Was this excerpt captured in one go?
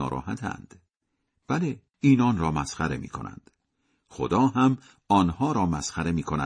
no; 1 cut; at 1.9 s

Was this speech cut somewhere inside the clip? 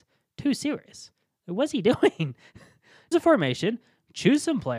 yes; 1 cut; at 3.1 s

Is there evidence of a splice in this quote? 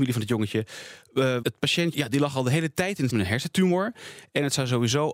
yes; 3 cuts; at 1.4 s, 1.9 s, 3.1 s

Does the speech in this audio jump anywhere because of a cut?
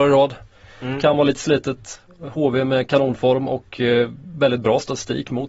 no; 0 cuts

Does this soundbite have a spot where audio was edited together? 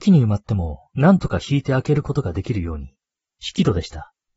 no; 0 cuts

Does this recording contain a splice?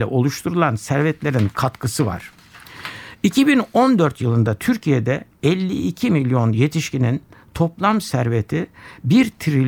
no; 0 cuts

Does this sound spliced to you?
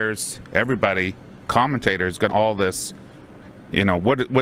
yes; 1 cut; at 2.3 s

